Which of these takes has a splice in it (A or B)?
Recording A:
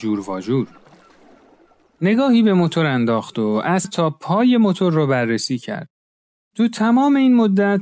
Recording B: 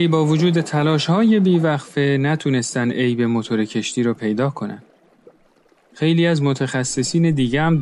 A